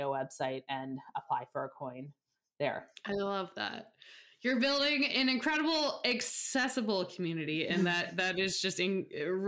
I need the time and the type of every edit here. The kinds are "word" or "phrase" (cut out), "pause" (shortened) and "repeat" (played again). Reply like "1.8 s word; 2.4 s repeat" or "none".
none